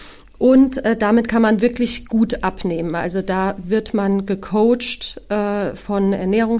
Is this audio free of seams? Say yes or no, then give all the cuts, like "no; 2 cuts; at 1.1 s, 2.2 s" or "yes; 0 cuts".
yes; 0 cuts